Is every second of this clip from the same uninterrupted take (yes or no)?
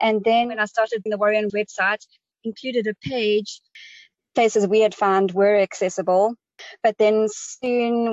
no